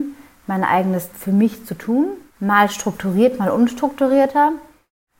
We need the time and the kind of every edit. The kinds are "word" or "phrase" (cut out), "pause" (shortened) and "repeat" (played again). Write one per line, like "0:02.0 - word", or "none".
0:01.1 - word
0:02.3 - pause